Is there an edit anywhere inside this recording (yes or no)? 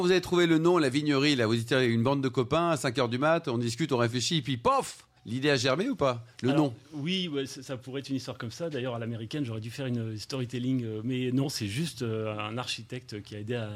yes